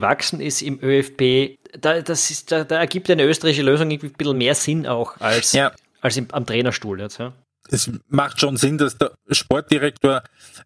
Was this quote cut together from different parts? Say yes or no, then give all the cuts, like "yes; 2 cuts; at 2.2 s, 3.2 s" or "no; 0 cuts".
no; 0 cuts